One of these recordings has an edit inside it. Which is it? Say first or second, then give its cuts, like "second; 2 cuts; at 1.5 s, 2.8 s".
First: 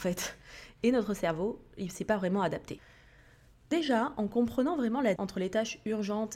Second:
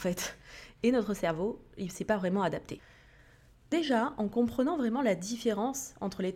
first; 1 cut; at 5.2 s